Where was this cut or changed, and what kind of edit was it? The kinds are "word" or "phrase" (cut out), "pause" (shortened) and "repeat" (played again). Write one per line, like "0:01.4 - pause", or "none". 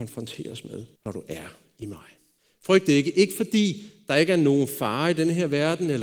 0:01.0 - pause
0:02.4 - pause